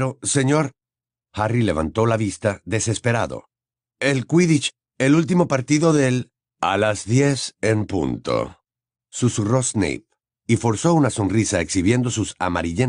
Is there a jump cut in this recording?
no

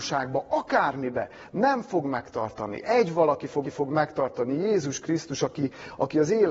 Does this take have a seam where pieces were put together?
yes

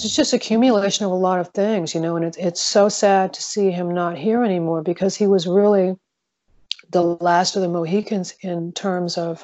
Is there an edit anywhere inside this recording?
no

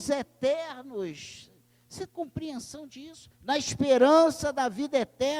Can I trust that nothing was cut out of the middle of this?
no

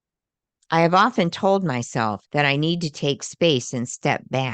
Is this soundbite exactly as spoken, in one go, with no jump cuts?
no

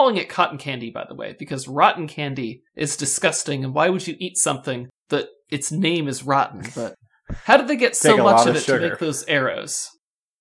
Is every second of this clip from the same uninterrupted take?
no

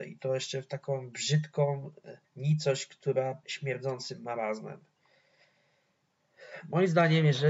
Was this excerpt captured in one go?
no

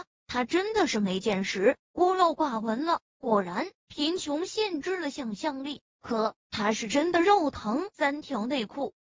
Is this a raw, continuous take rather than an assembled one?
no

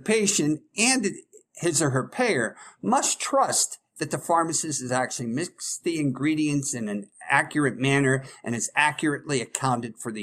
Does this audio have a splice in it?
no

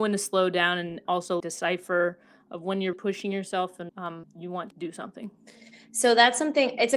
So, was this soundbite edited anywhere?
yes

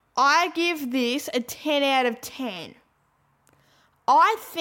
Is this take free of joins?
yes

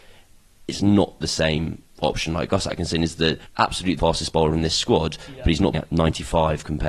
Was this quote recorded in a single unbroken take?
no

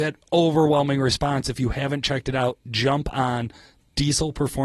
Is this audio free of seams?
yes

